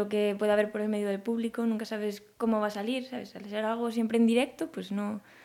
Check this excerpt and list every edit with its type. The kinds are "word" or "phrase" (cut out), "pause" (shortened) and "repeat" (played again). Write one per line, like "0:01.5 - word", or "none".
none